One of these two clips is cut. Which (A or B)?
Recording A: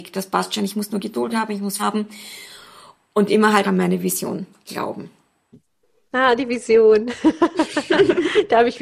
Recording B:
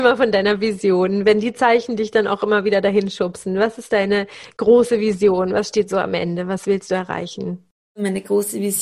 A